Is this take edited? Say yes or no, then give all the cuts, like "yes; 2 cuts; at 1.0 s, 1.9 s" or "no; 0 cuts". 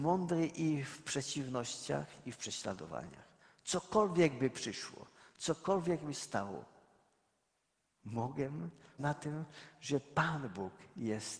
yes; 2 cuts; at 6.1 s, 9.0 s